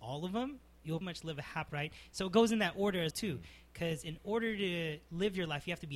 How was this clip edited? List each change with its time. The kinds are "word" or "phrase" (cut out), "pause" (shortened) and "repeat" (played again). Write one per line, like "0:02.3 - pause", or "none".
0:01.0 - word
0:01.7 - word
0:03.1 - word